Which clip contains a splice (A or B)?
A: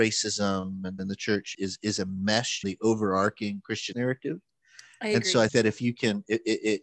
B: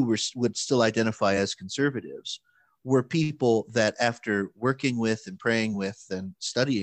A